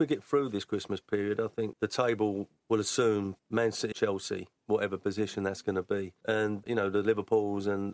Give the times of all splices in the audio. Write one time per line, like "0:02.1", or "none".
0:01.7
0:03.9